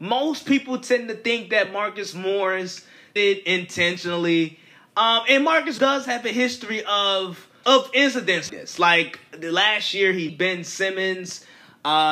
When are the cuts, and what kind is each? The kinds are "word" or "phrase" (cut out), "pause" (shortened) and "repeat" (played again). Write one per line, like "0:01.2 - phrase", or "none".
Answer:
0:03.2 - word
0:05.8 - word
0:07.6 - word
0:08.5 - word
0:10.3 - word

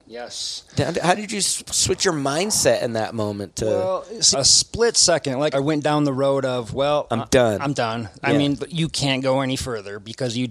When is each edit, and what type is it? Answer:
0:04.3 - phrase
0:05.5 - phrase

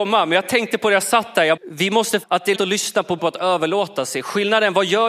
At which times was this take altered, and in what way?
0:01.6 - word
0:02.2 - word
0:02.5 - word
0:03.2 - word

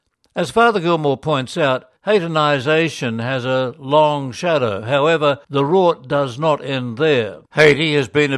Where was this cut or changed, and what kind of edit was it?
0:02.0 - pause
0:05.4 - pause
0:07.5 - pause

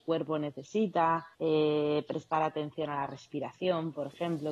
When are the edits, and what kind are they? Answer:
0:01.3 - pause

